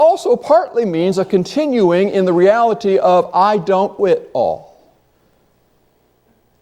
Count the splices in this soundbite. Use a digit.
1